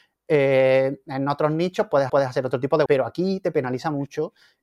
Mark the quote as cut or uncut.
cut